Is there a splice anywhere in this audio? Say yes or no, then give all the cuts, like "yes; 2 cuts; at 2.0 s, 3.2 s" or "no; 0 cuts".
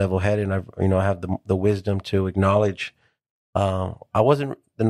no; 0 cuts